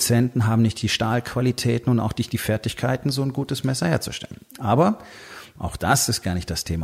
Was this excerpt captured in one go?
yes; 0 cuts

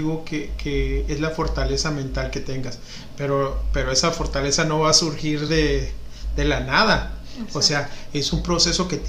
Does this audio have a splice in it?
no; 0 cuts

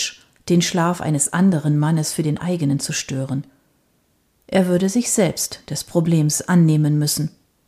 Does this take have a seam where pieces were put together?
no; 0 cuts

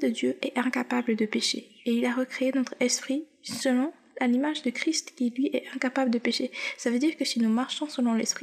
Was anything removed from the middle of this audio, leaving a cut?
no; 0 cuts

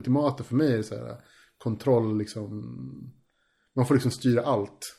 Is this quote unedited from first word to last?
yes; 0 cuts

